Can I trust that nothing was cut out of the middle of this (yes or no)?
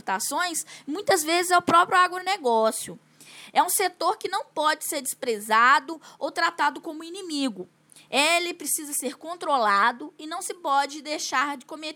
yes